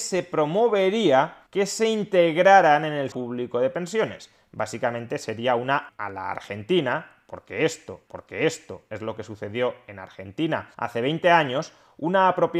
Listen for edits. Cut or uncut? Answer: cut